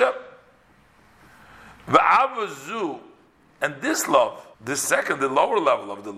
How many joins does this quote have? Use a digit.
1